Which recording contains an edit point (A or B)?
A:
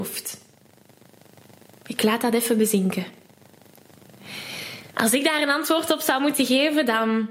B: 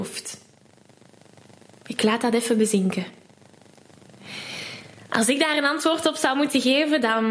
A